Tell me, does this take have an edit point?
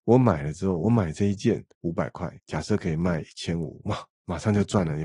yes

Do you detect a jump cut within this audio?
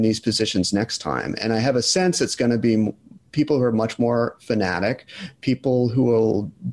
no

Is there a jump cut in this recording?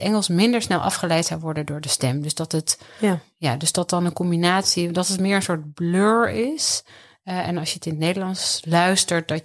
no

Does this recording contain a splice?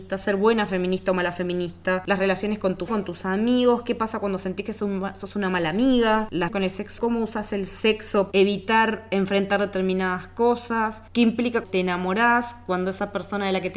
yes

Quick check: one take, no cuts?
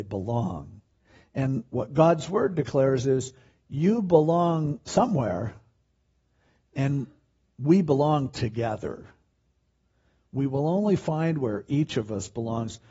yes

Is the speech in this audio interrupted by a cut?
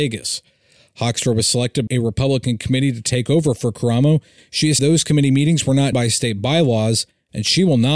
yes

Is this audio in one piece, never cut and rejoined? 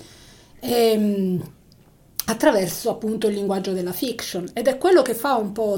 yes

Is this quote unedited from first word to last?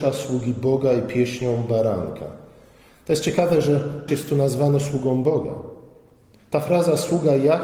no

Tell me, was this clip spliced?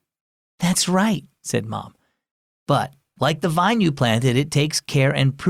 no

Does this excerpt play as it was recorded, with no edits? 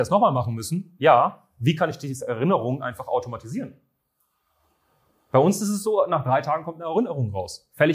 yes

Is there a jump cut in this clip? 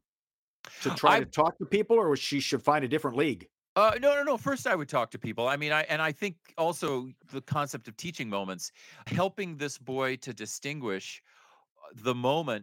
yes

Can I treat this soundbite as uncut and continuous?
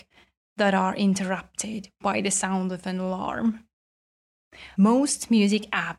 no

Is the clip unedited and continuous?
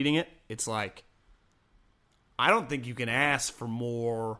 yes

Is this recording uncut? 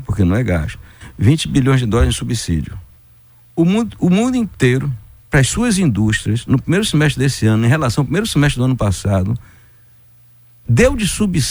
yes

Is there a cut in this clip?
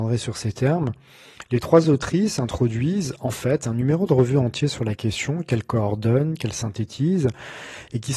no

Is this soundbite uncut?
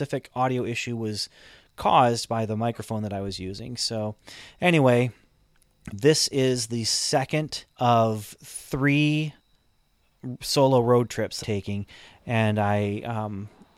no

